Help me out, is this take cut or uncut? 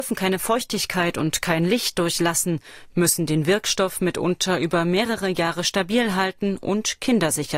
uncut